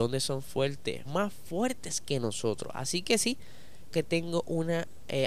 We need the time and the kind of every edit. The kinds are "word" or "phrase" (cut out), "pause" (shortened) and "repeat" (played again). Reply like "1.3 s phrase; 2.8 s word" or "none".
1.1 s word; 3.9 s word